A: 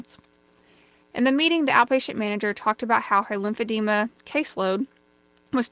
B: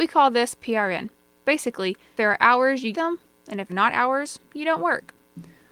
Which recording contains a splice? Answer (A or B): B